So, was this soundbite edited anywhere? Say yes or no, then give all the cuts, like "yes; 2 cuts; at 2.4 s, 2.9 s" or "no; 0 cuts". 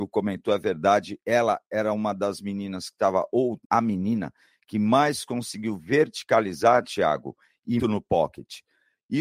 yes; 2 cuts; at 3.6 s, 7.8 s